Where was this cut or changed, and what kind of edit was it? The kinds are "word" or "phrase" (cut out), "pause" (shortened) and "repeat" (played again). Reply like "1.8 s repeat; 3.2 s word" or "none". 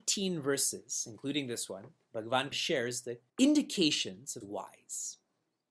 2.5 s word; 3.3 s pause; 4.4 s phrase

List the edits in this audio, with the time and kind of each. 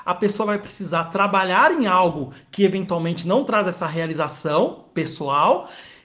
none

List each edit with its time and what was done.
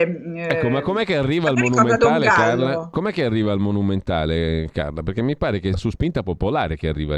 5.7 s word

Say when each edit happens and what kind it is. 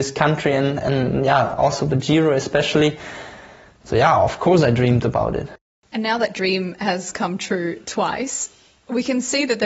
none

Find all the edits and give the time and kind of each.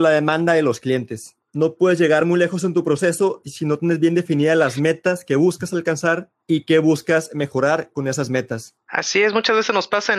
none

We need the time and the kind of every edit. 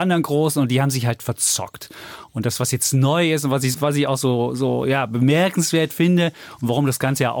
3.7 s word

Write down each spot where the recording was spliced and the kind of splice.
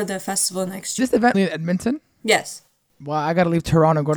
1.0 s phrase; 1.3 s word

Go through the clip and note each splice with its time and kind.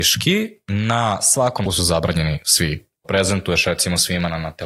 1.7 s word; 3.0 s phrase

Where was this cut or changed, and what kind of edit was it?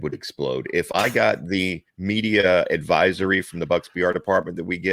1.9 s pause

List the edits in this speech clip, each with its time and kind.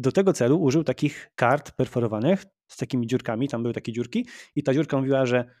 1.3 s pause

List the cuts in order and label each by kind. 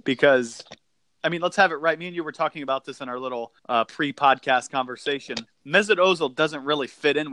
3.6 s pause; 5.5 s pause

